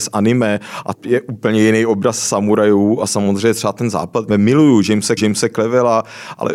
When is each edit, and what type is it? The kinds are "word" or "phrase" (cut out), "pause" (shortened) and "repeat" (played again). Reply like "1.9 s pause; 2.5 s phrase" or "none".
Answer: 0.9 s word; 4.3 s phrase; 5.2 s repeat

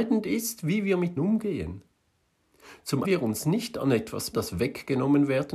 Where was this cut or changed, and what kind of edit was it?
1.2 s word; 3.0 s phrase; 4.3 s word

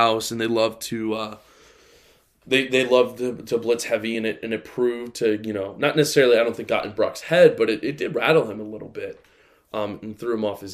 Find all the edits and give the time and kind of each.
none

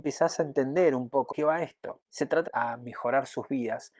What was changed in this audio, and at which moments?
1.3 s word; 2.5 s phrase

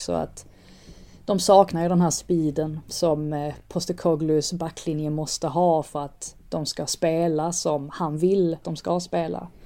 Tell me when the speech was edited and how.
2.8 s pause; 8.6 s word

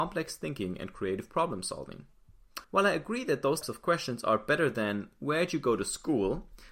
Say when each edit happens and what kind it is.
2.6 s pause; 3.6 s word

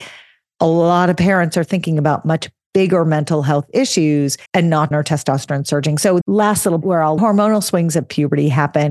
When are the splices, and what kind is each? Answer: 4.5 s pause; 4.9 s phrase; 6.2 s word; 6.8 s word; 7.2 s phrase

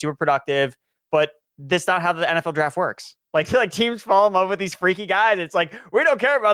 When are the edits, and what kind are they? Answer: none

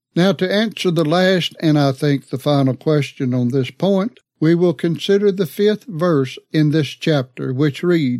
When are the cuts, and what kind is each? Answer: 4.3 s pause; 6.4 s pause

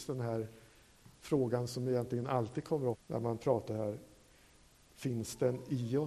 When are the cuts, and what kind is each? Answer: 2.9 s word; 3.7 s word

